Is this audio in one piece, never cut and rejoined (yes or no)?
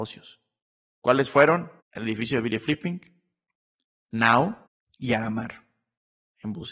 no